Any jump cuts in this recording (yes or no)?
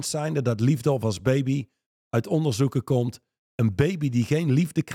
no